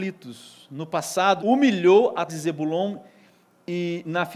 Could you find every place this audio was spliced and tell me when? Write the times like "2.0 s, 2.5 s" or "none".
1.4 s, 2.3 s